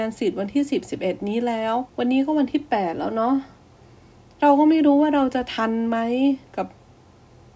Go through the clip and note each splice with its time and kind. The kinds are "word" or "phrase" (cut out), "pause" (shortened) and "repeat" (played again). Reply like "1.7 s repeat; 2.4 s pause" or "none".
1.9 s pause